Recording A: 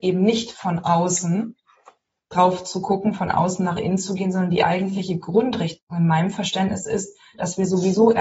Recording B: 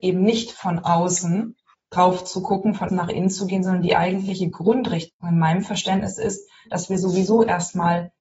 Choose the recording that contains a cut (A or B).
B